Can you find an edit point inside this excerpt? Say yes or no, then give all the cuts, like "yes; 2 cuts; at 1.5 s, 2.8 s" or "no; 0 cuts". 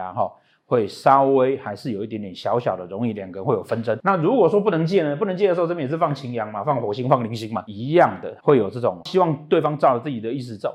yes; 2 cuts; at 8.4 s, 9.0 s